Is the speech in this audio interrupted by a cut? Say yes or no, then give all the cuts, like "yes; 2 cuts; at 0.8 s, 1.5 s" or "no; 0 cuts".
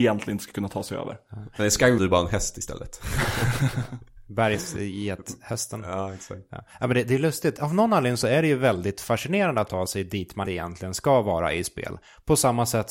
yes; 4 cuts; at 2.0 s, 7.6 s, 9.7 s, 10.5 s